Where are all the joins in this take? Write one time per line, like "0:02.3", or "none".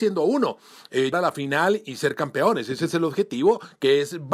0:01.1